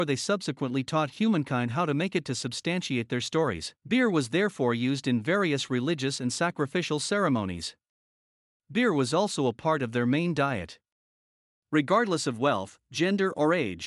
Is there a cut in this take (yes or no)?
yes